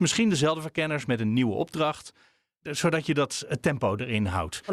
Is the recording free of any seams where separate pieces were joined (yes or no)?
yes